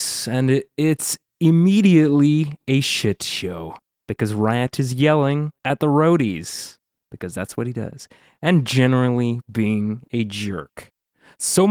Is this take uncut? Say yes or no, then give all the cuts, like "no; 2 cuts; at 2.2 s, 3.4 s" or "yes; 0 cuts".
no; 1 cut; at 5.6 s